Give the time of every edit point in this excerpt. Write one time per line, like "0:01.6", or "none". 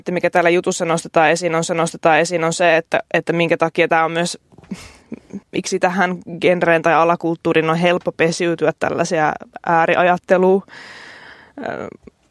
0:01.7
0:05.4